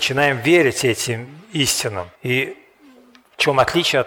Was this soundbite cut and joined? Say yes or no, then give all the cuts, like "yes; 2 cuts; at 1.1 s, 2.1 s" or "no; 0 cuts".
yes; 1 cut; at 2.1 s